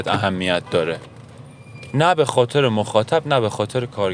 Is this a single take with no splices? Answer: yes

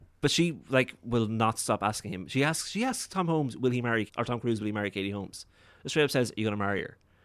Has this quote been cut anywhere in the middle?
yes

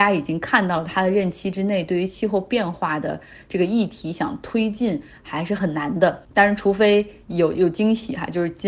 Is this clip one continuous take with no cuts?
no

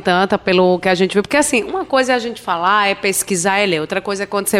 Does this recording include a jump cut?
no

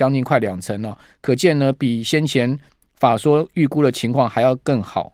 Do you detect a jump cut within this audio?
no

